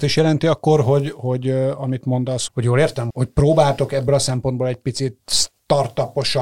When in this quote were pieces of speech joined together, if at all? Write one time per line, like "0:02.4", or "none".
0:02.5
0:03.1